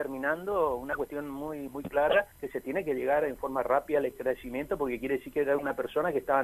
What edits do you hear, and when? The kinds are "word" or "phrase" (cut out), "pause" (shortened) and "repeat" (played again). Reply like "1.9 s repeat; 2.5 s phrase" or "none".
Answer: 1.7 s word; 2.3 s pause